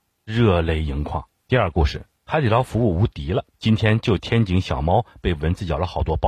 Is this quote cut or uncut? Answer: cut